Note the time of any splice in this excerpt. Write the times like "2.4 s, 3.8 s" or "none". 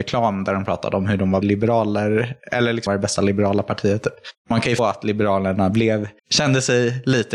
1.4 s, 2.9 s, 4.4 s, 4.8 s, 6.2 s

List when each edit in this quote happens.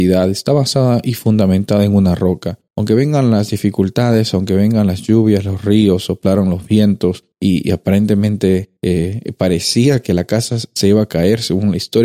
2.7 s, 7.3 s, 8.8 s

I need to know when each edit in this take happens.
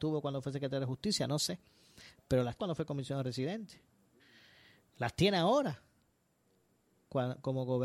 2.6 s

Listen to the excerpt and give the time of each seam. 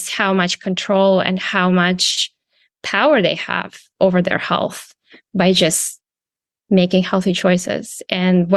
none

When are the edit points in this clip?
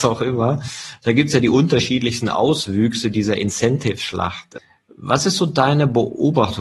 none

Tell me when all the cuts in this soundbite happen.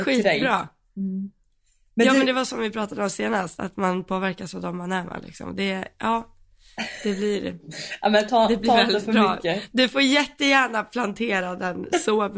none

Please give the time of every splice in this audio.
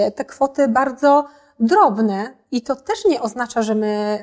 none

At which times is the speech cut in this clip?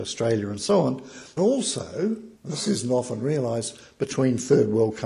1.4 s, 2.4 s

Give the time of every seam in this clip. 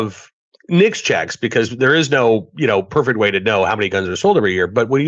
none

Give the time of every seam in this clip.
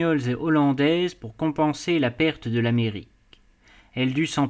none

